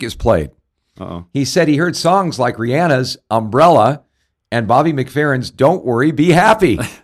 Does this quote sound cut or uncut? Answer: uncut